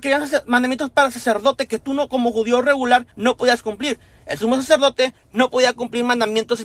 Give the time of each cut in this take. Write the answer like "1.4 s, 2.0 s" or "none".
3.1 s